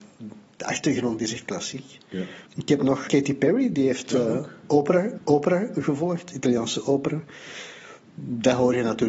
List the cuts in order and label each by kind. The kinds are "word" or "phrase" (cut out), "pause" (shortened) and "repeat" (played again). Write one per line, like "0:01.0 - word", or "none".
0:02.5 - pause
0:03.1 - word
0:05.2 - repeat